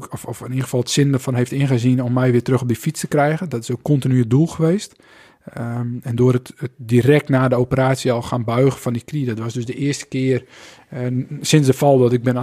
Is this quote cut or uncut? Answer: uncut